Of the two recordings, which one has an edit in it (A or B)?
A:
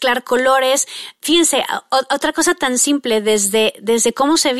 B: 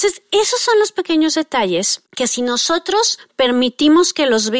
B